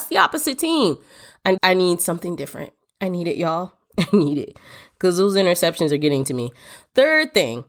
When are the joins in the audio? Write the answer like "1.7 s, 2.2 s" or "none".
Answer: 1.6 s